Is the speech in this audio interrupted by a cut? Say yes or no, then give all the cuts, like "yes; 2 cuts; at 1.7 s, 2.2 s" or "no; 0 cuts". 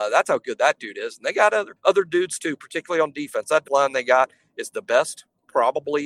yes; 2 cuts; at 1.8 s, 3.6 s